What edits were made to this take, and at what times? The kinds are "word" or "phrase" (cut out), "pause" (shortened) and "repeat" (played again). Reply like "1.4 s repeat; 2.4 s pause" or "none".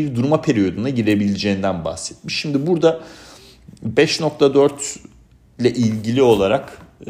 none